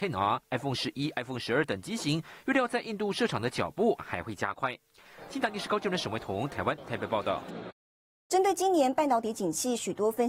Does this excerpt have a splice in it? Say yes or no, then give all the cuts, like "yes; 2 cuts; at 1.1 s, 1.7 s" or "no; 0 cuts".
no; 0 cuts